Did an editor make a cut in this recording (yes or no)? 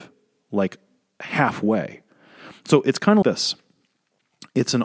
yes